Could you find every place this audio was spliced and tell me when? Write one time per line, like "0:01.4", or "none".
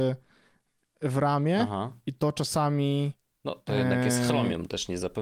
none